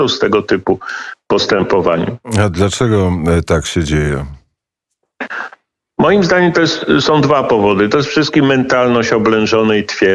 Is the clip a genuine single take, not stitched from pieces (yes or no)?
yes